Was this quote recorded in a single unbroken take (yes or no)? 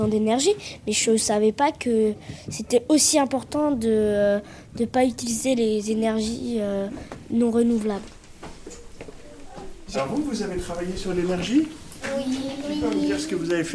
yes